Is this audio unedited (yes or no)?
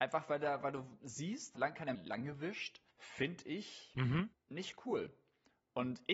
no